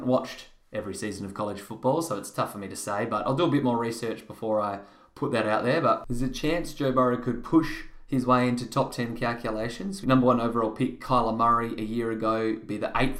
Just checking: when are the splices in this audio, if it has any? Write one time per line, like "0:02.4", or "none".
0:10.0